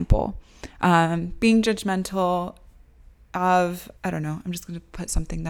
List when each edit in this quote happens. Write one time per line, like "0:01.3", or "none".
0:04.0